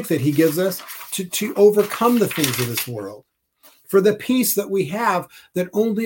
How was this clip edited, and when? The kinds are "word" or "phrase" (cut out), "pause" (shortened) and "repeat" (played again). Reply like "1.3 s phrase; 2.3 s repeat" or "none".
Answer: none